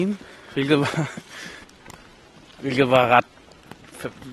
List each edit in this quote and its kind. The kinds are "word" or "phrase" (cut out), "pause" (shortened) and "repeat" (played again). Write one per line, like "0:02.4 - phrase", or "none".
0:01.6 - pause